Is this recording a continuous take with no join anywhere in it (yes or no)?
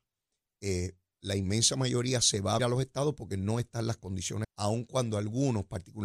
no